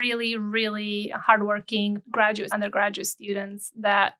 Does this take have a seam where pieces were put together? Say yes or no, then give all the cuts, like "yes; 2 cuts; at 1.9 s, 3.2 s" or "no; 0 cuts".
yes; 2 cuts; at 2.0 s, 2.5 s